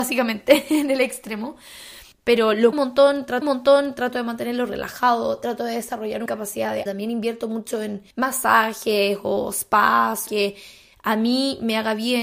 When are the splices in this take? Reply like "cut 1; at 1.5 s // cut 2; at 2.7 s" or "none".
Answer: cut 1; at 2.1 s // cut 2; at 2.7 s // cut 3; at 3.4 s // cut 4; at 6.3 s // cut 5; at 6.9 s // cut 6; at 8.1 s // cut 7; at 10.3 s